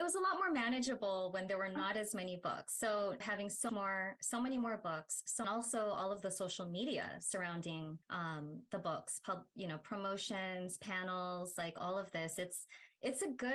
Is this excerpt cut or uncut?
cut